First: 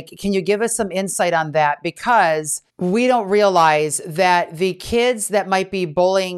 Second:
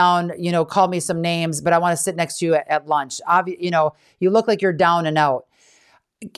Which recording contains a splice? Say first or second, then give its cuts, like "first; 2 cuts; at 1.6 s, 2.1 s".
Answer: first; 1 cut; at 2.7 s